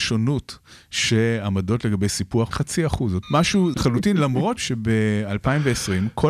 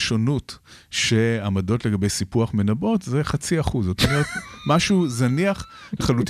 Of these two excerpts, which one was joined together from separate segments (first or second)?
first